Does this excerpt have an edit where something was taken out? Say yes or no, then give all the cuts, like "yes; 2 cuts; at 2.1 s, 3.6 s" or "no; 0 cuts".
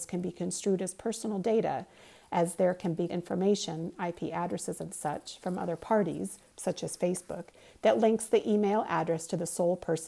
yes; 1 cut; at 3.1 s